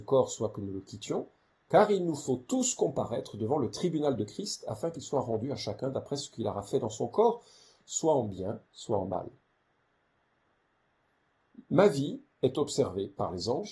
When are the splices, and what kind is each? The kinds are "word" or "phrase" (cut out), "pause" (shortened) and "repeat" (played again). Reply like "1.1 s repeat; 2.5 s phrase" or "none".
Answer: 8.7 s pause; 11.6 s pause; 12.3 s pause

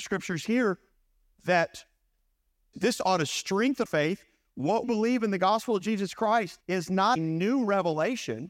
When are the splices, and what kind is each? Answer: 2.7 s word; 3.9 s word; 4.8 s word; 6.6 s pause; 7.2 s word

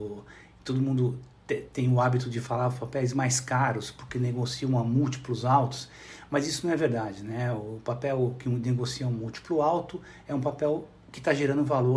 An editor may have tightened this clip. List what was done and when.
1.7 s word

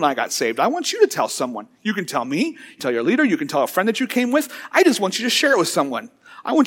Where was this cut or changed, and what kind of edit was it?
2.8 s word

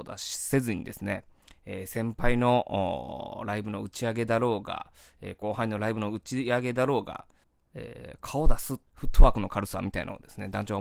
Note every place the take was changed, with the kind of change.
7.4 s pause; 8.9 s pause

